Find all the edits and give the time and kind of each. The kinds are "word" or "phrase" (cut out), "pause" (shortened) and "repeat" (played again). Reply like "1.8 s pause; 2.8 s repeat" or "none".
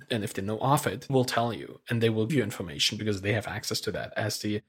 1.1 s word; 2.3 s word